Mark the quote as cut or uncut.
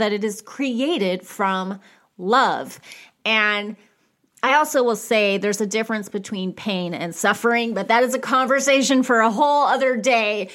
uncut